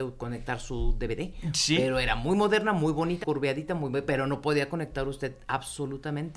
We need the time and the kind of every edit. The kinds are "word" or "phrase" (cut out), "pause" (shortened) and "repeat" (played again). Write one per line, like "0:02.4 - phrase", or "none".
0:03.2 - word